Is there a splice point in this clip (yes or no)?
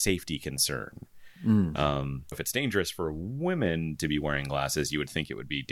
yes